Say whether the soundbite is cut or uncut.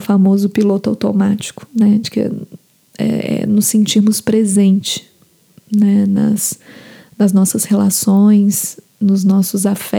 uncut